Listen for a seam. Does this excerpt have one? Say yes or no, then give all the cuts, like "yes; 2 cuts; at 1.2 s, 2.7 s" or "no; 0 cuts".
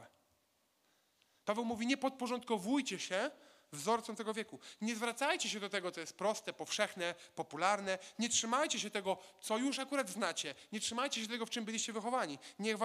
no; 0 cuts